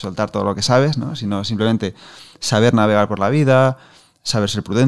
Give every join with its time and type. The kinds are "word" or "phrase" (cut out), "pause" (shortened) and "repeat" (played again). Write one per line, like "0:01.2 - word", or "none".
none